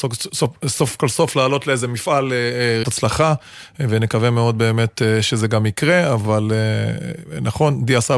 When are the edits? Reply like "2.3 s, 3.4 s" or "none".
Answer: 2.8 s